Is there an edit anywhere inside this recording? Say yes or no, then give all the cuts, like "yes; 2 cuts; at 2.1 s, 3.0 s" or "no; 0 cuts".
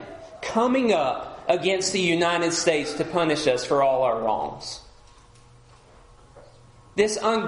no; 0 cuts